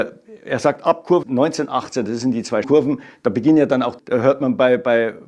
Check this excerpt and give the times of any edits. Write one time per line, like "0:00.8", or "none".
0:01.2
0:02.6
0:04.0